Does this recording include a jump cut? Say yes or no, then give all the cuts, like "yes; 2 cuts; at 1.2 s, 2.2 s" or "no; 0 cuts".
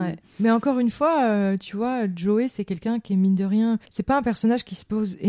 yes; 1 cut; at 3.9 s